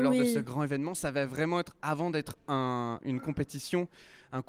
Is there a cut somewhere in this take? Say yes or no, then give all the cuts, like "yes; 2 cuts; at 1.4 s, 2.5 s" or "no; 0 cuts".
no; 0 cuts